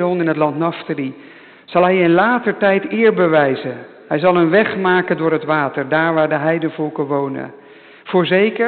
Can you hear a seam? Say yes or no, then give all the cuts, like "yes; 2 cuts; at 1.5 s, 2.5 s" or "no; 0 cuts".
no; 0 cuts